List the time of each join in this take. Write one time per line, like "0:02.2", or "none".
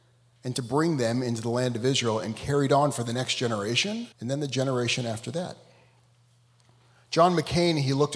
0:04.1